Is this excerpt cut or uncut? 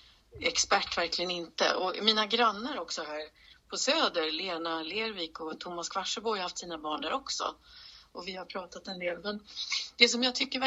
uncut